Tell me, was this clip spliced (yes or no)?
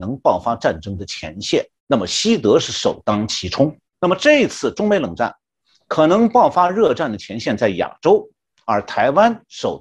yes